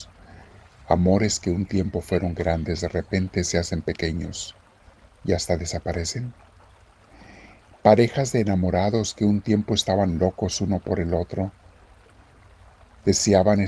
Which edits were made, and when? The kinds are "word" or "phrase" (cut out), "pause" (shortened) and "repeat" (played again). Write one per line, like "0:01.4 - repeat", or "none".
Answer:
none